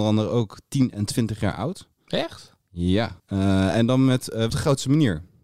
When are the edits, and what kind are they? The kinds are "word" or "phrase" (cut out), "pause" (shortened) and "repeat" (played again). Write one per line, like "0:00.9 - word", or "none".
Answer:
0:03.2 - pause
0:04.5 - phrase